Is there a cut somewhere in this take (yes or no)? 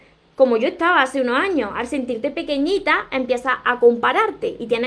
no